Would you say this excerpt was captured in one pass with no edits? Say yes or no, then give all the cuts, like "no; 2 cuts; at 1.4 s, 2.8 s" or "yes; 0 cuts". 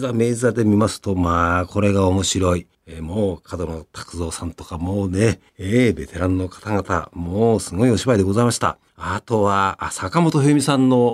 no; 3 cuts; at 2.7 s, 5.5 s, 8.9 s